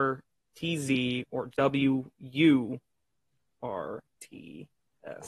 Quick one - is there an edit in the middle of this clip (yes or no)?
no